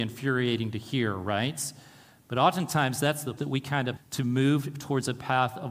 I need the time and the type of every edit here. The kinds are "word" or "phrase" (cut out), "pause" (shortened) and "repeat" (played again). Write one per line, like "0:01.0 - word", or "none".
0:03.4 - word
0:04.0 - word